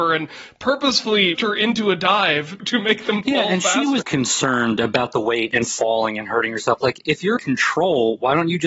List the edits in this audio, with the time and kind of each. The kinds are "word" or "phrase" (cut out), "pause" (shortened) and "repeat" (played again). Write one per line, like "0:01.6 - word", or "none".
0:01.4 - word
0:04.0 - word
0:07.4 - word